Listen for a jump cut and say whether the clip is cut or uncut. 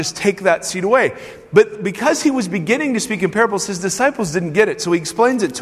uncut